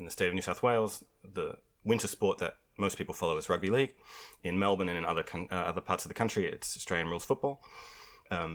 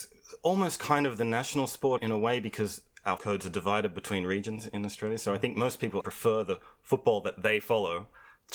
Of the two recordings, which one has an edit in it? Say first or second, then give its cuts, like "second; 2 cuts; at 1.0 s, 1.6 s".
second; 3 cuts; at 2.0 s, 3.2 s, 6.0 s